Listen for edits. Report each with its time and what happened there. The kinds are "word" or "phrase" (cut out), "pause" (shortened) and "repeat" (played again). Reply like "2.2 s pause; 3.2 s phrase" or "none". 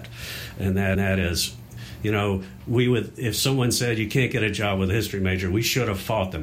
1.0 s repeat